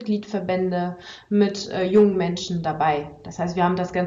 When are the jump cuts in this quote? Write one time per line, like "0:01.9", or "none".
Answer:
none